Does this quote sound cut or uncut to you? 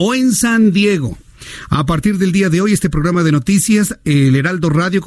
uncut